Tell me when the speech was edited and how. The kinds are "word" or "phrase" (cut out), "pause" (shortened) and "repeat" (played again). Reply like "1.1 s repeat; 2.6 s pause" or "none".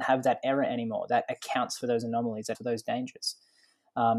2.5 s word